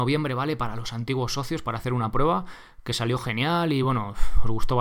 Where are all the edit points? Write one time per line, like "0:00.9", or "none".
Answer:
none